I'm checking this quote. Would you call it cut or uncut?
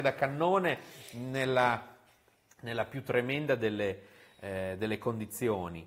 uncut